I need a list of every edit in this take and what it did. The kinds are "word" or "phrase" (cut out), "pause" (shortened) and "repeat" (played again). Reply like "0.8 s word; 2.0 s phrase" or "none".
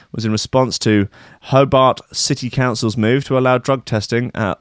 none